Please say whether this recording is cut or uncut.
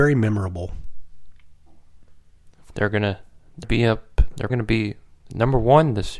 cut